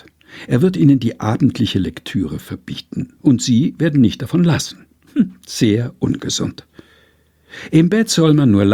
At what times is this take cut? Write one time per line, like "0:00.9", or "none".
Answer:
0:03.2

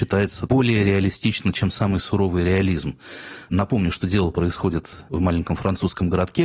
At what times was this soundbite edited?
none

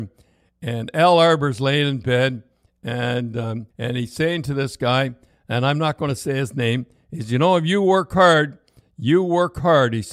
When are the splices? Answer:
0:03.7

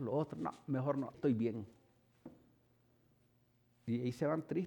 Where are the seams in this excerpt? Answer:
0:01.1

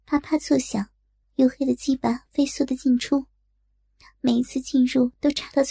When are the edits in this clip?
0:01.2

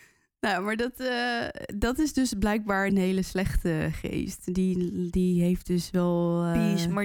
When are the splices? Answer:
0:02.9

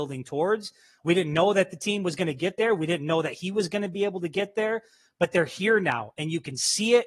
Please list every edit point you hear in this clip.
none

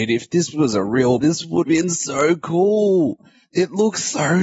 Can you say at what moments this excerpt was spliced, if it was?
0:01.2
0:01.6

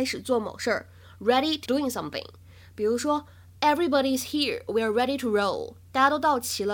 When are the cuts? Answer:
0:01.7

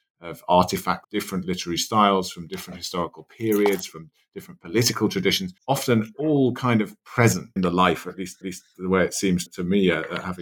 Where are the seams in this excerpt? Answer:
0:01.0
0:05.6
0:07.6
0:08.4
0:09.5

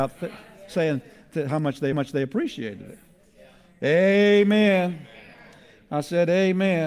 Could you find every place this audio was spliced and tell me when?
0:01.9

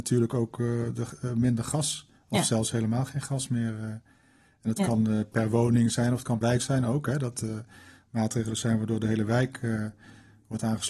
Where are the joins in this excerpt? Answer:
0:06.4

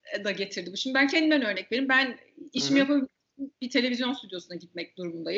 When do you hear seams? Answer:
none

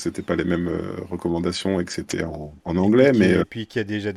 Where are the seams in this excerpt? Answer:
0:02.6

